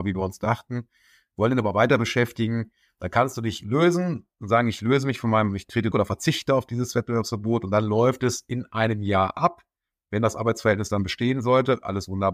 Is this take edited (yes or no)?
yes